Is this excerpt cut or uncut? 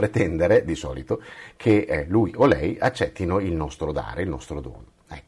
uncut